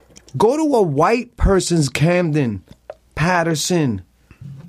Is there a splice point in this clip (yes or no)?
no